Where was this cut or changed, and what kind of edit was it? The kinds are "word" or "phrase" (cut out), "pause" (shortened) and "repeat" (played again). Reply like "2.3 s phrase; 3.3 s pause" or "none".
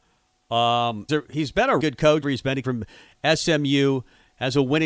1.1 s word; 1.8 s word; 2.2 s word; 2.6 s word